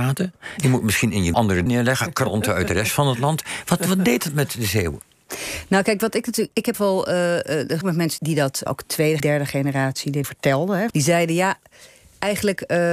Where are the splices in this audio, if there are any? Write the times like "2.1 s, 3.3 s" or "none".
1.3 s, 1.7 s, 6.7 s, 7.8 s, 8.2 s, 8.7 s, 9.2 s, 10.2 s, 10.9 s